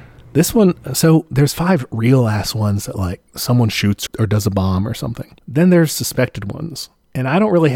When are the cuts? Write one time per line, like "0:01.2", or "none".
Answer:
0:03.3
0:04.1
0:05.4

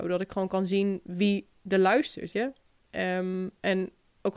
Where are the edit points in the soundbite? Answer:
0:02.3

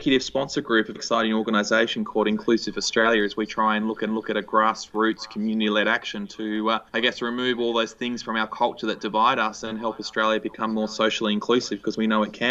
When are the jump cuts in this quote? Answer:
0:01.0
0:04.1
0:06.9

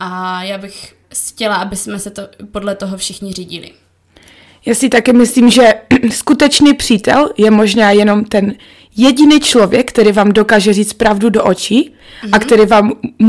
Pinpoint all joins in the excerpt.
0:01.0

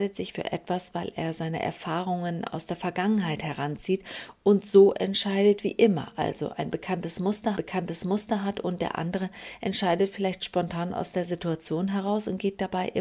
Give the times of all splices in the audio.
0:07.6

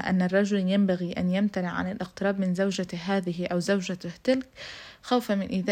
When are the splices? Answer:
none

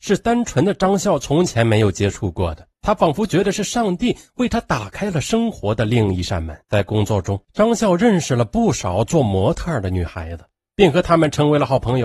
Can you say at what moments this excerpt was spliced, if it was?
0:02.7
0:06.6
0:07.4

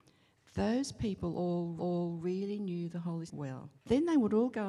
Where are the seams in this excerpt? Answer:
0:01.8
0:03.3
0:03.8

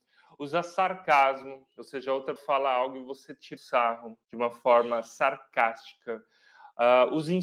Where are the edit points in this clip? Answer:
0:02.4
0:03.6
0:04.2

